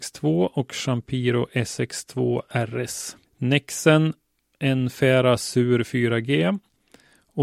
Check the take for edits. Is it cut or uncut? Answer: cut